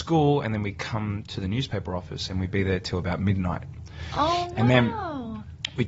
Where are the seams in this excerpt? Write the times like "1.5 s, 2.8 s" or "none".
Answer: none